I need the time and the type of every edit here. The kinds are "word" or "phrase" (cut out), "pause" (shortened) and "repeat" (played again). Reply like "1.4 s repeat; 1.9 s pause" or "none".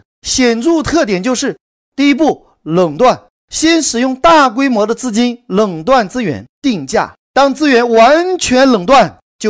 6.6 s phrase